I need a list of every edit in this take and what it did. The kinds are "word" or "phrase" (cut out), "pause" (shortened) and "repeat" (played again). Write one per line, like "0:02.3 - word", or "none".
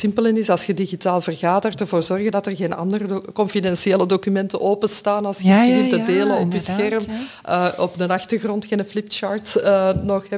none